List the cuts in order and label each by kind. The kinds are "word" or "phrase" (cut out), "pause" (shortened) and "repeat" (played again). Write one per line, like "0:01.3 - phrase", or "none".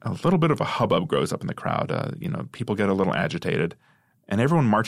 none